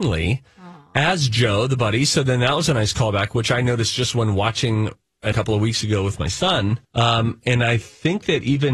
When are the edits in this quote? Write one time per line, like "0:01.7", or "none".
0:05.3
0:06.8

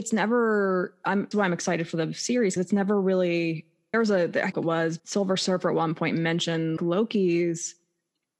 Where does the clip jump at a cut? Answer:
0:01.3
0:02.6
0:03.9
0:04.5
0:05.0
0:06.8

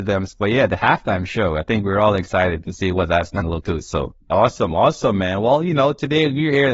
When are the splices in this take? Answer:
0:03.6
0:04.2

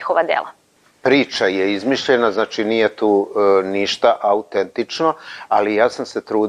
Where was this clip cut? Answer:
none

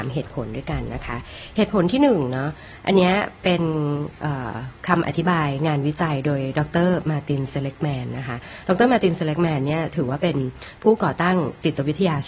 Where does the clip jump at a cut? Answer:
0:04.8

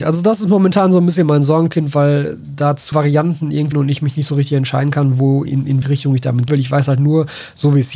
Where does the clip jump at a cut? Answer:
0:02.9
0:03.7
0:05.5
0:05.8
0:06.5

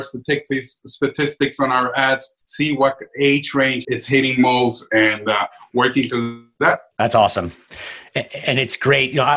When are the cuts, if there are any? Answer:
0:02.4
0:03.8
0:06.9

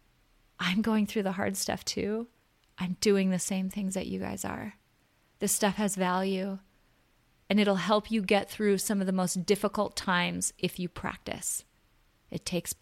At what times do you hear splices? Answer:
none

